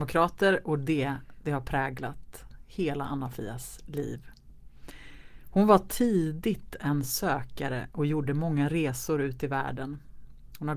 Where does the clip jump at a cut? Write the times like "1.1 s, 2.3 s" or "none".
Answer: none